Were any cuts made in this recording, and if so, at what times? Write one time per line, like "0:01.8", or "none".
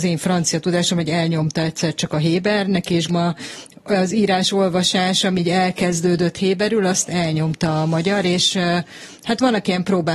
0:03.1